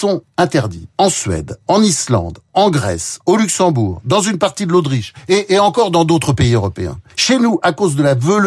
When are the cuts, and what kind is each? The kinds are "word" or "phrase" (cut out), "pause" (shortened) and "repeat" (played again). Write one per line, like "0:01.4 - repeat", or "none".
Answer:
0:00.9 - pause
0:07.1 - pause